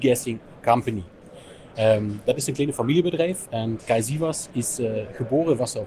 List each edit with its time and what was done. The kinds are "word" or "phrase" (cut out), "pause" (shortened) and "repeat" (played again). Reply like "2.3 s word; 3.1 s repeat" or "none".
3.8 s word

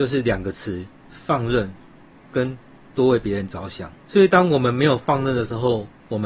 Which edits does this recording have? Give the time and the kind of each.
2.1 s pause; 4.0 s pause

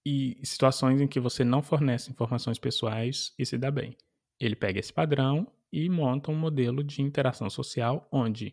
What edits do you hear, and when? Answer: none

